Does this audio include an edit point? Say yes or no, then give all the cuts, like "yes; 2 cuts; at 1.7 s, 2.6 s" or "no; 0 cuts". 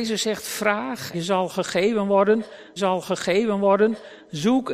yes; 2 cuts; at 1.1 s, 2.8 s